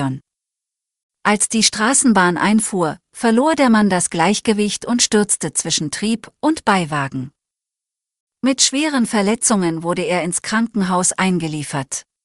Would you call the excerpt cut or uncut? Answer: uncut